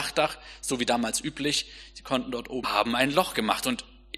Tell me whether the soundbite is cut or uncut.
cut